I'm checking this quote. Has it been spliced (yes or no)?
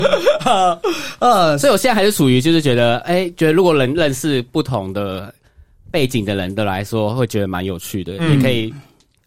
no